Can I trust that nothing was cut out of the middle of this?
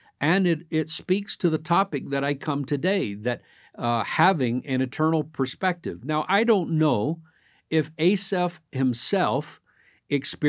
yes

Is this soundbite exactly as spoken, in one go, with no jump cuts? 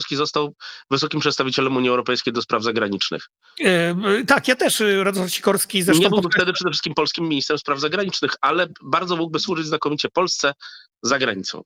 yes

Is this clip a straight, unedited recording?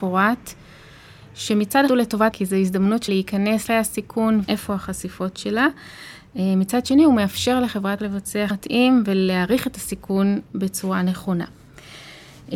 no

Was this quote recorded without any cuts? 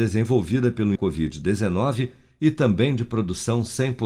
no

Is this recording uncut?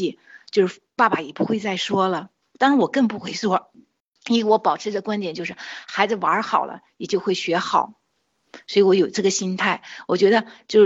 yes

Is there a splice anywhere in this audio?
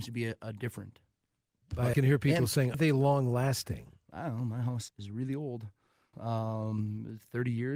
yes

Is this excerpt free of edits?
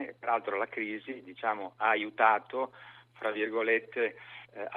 yes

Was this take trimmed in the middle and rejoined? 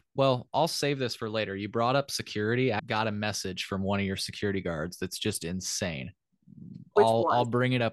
yes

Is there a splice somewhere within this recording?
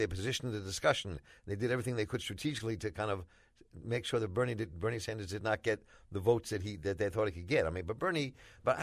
no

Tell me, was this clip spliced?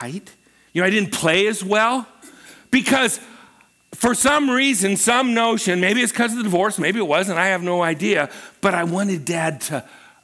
no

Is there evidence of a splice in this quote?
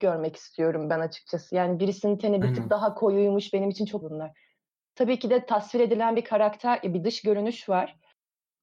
yes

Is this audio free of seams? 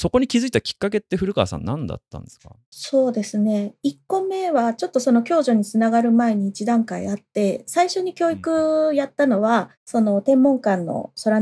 no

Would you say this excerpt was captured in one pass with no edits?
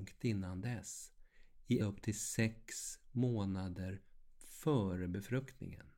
no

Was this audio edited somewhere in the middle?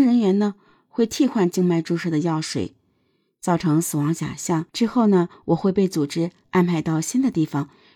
yes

